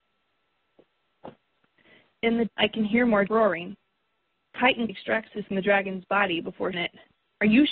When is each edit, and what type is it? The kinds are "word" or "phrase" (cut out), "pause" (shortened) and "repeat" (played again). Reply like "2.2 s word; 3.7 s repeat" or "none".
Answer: 2.5 s word; 3.3 s word; 4.9 s word; 5.5 s word; 6.7 s word